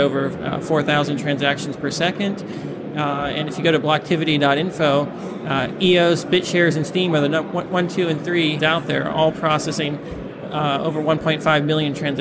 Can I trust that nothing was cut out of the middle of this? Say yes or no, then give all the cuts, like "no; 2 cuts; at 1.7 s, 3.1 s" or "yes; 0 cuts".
no; 1 cut; at 8.6 s